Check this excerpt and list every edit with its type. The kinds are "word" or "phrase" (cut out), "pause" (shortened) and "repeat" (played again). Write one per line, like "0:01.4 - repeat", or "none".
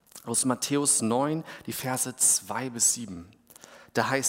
none